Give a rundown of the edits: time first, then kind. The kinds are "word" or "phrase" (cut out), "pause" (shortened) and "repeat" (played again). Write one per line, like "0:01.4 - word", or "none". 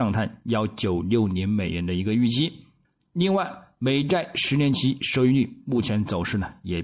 0:02.8 - pause